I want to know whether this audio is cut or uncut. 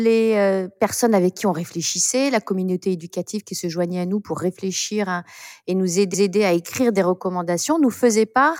cut